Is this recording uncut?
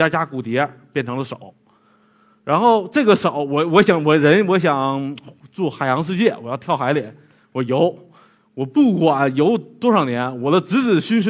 yes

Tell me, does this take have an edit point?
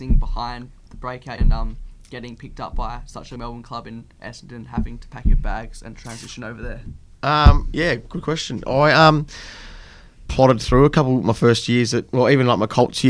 yes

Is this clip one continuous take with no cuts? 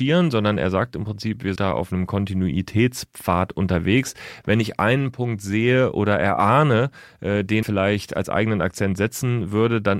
no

